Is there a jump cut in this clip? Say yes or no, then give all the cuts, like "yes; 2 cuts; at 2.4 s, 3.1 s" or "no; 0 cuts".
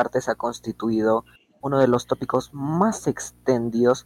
no; 0 cuts